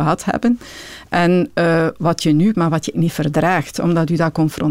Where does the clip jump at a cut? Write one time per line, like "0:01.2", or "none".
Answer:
0:02.5
0:02.9

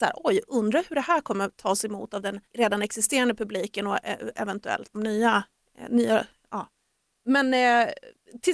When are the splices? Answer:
0:02.5
0:04.9

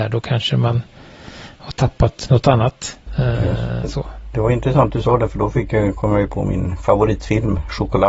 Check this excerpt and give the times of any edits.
0:03.8
0:06.3

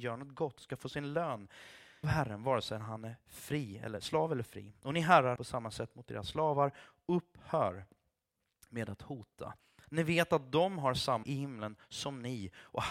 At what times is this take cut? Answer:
0:02.0
0:05.4
0:11.2

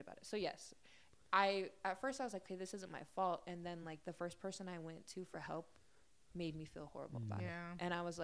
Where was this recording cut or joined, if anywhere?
none

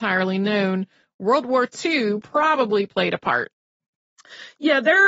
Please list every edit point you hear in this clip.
none

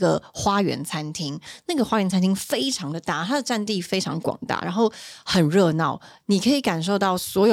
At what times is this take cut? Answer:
none

